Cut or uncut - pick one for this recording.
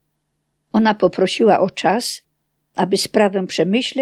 uncut